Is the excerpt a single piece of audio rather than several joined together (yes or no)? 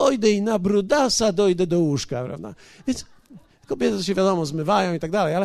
yes